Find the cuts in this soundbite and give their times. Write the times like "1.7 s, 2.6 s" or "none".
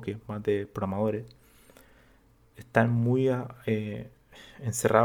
none

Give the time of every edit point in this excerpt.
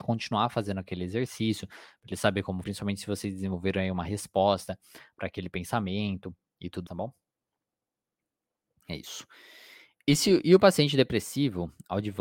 2.6 s, 6.9 s

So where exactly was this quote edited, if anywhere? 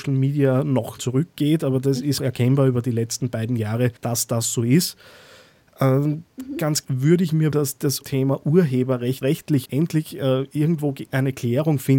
1.0 s, 2.2 s, 4.0 s, 6.8 s, 7.5 s, 8.0 s, 9.2 s, 9.7 s

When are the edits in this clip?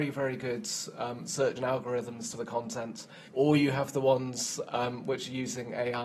1.6 s, 2.3 s, 3.3 s

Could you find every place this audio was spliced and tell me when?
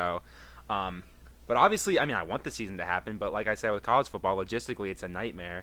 none

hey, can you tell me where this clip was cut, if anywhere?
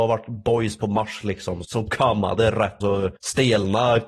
1.6 s, 2.8 s, 3.2 s

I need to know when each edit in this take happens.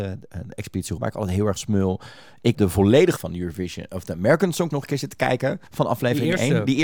1.0 s, 1.6 s, 2.5 s, 3.2 s, 4.7 s, 5.7 s

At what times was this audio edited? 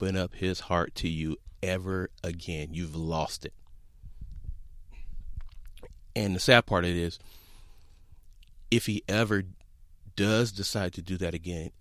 none

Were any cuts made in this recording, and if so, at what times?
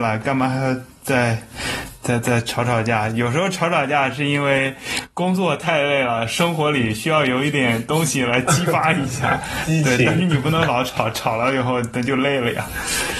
none

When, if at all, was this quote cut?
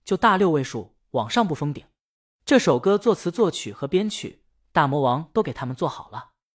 none

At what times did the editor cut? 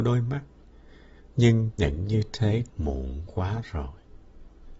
1.8 s, 2.7 s

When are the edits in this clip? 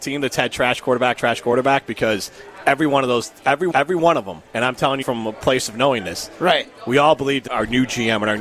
1.2 s, 3.7 s, 4.4 s, 5.0 s, 7.5 s

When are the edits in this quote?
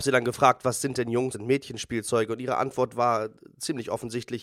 1.3 s

